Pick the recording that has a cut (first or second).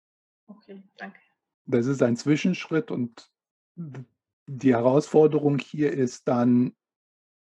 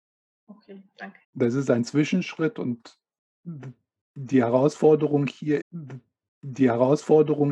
second